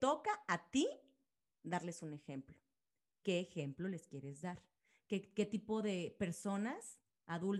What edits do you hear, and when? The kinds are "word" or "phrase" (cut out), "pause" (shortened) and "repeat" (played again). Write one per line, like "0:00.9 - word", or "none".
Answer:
none